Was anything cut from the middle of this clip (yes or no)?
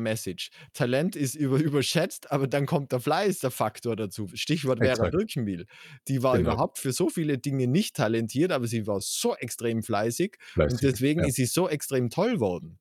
no